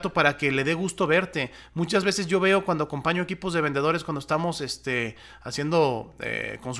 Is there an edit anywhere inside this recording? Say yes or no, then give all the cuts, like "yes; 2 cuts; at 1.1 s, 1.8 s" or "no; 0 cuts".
no; 0 cuts